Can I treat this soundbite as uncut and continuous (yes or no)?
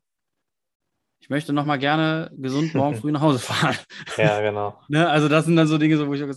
yes